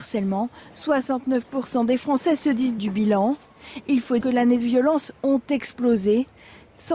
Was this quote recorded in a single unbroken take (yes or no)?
no